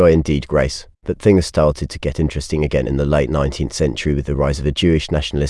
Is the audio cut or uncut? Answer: cut